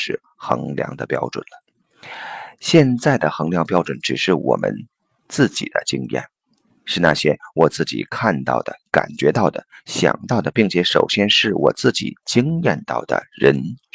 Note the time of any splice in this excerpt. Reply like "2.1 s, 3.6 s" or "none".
6.7 s